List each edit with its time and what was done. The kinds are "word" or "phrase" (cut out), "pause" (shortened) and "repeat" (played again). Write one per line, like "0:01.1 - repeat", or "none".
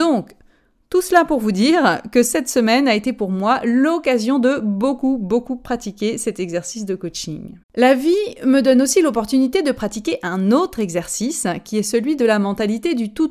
0:07.6 - pause